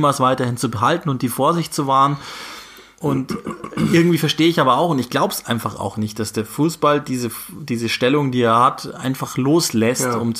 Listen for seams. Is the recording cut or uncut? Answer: uncut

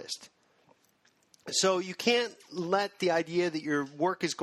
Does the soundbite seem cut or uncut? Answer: uncut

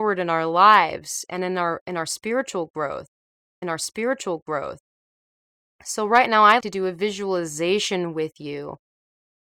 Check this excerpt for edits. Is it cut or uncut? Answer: cut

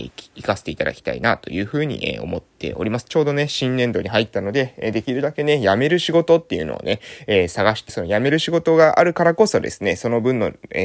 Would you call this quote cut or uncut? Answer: cut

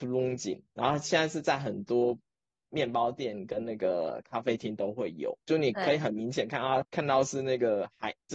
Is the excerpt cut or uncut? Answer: cut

